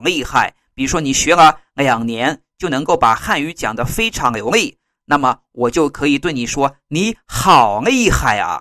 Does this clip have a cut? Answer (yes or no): no